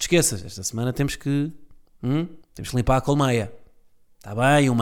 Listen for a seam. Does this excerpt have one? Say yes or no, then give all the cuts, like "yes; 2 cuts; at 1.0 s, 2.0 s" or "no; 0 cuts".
yes; 1 cut; at 2.4 s